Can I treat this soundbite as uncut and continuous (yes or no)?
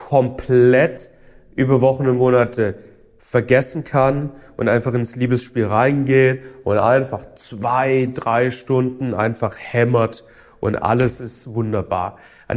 yes